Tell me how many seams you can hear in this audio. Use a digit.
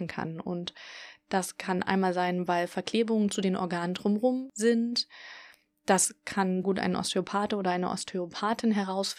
1